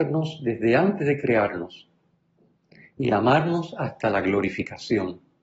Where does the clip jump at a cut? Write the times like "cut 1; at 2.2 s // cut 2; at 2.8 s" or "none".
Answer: none